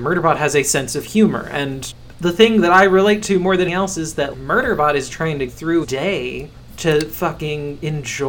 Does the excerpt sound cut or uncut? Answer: cut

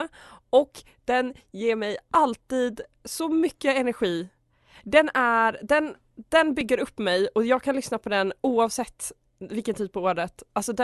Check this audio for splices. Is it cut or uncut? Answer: uncut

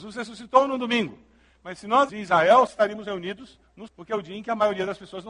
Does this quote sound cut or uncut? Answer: cut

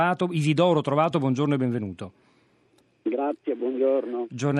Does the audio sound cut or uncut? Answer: uncut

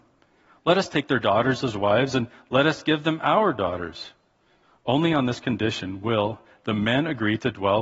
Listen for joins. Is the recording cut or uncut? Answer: uncut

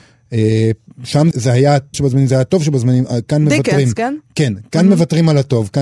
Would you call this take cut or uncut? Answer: cut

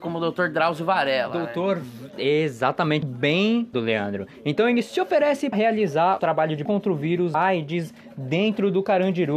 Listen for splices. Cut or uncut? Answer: cut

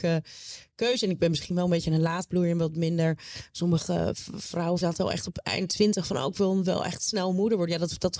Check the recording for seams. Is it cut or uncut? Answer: cut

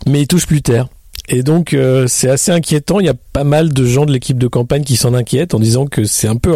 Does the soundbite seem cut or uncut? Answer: uncut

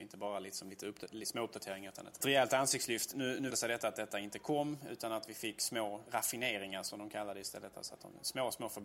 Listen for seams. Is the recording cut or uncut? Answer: cut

